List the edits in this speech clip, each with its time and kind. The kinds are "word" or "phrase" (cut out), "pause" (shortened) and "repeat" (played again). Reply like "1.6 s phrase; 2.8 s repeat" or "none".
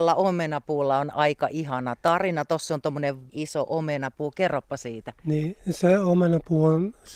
3.3 s word

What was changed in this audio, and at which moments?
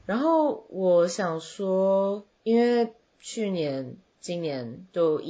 2.3 s pause

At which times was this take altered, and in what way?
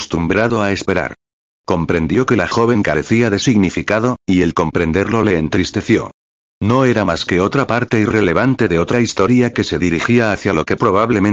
none

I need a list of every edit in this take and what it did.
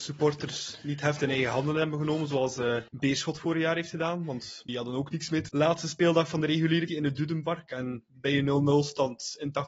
2.9 s pause; 4.7 s word; 5.5 s phrase; 6.9 s word

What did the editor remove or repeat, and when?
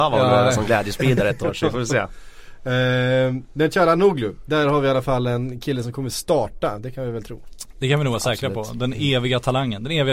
none

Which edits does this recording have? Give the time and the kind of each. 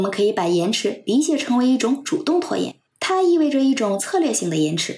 2.9 s pause

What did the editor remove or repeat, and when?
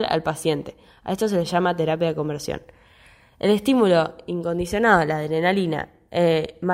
none

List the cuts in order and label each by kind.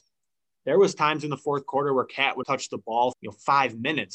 2.4 s word; 3.1 s word

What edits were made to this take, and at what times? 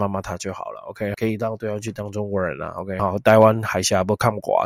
1.1 s word; 3.0 s phrase

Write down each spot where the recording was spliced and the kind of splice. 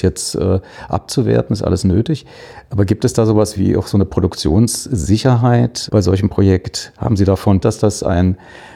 3.6 s word; 5.9 s word; 7.6 s word

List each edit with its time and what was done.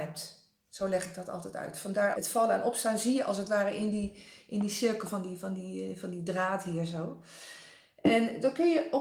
2.1 s word

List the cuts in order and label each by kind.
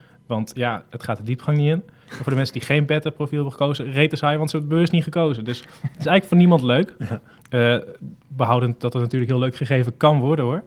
8.2 s pause

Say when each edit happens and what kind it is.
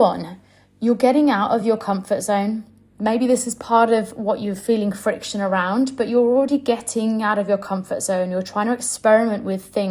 none

